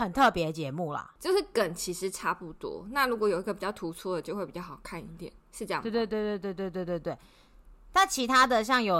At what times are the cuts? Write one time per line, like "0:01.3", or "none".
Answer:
0:05.4